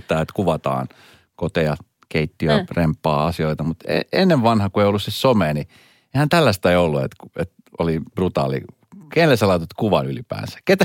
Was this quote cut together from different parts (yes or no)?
no